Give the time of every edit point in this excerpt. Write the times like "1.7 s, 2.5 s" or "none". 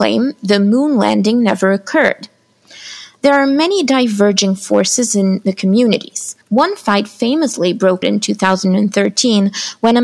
6.4 s, 8.0 s